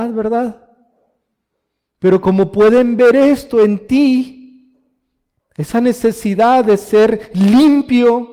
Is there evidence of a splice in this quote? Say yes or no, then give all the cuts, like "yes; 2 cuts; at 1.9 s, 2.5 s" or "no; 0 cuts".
no; 0 cuts